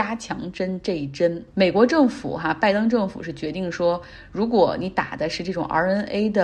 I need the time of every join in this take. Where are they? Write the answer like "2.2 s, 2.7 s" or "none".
1.5 s